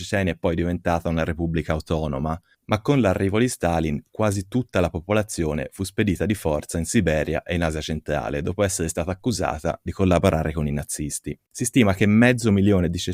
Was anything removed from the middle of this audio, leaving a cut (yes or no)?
yes